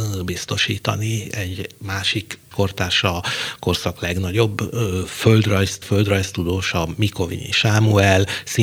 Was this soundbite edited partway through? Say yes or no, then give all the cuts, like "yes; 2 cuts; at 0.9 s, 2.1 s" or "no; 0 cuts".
yes; 2 cuts; at 2.5 s, 5.8 s